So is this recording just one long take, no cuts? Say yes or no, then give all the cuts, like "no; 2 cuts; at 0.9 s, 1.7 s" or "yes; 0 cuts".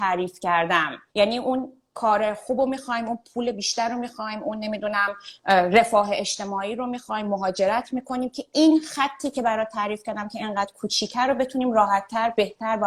no; 2 cuts; at 1.1 s, 5.4 s